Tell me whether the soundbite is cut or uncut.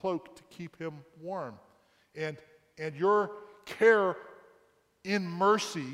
uncut